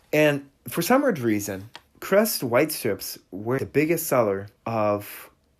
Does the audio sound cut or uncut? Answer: cut